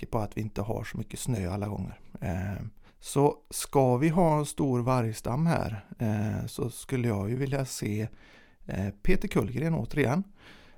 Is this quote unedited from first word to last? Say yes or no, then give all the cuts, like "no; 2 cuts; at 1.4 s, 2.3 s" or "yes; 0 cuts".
no; 1 cut; at 2.9 s